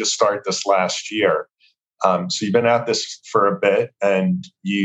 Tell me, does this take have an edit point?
no; 0 cuts

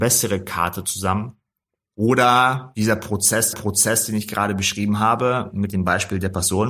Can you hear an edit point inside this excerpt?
yes; 2 cuts; at 1.8 s, 3.5 s

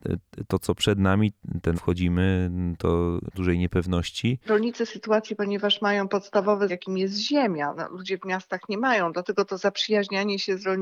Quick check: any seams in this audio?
yes; 4 cuts; at 1.7 s, 3.3 s, 4.9 s, 6.7 s

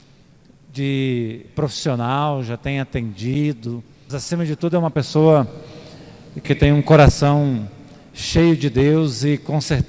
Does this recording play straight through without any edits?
no; 3 cuts; at 1.5 s, 4.1 s, 6.4 s

